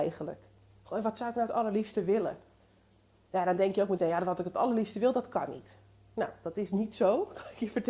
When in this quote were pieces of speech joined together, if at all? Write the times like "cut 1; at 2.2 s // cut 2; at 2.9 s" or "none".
none